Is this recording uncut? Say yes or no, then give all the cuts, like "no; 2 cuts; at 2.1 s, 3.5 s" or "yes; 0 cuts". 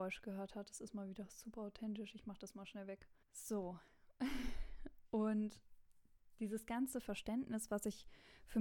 no; 1 cut; at 3.2 s